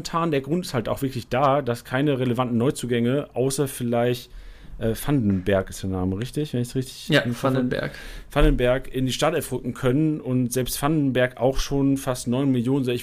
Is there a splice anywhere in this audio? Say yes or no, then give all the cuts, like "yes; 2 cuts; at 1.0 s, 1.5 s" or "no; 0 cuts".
no; 0 cuts